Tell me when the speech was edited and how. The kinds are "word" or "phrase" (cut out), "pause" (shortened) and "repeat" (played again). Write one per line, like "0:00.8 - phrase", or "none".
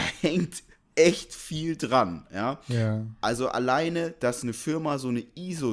none